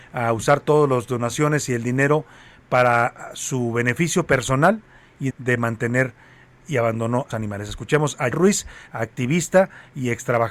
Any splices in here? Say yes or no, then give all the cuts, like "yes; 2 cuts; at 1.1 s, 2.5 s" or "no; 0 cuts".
yes; 4 cuts; at 5.3 s, 7.3 s, 8.3 s, 8.9 s